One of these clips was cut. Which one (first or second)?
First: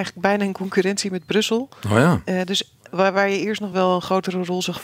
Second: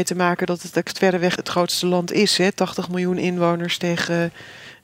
second